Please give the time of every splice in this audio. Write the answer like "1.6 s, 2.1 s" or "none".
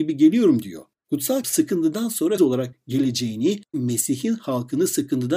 1.4 s, 2.4 s, 3.7 s